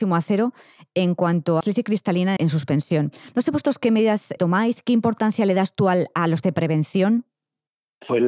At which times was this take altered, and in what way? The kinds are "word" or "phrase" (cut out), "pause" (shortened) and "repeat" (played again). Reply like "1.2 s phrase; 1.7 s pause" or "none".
1.6 s word; 2.4 s word; 4.4 s word; 6.4 s word